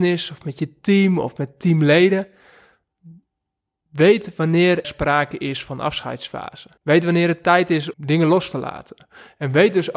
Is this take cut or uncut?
cut